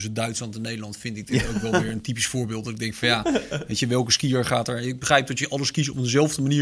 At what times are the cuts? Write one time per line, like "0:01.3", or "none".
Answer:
none